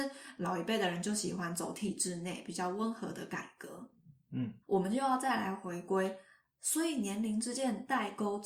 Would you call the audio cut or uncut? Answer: cut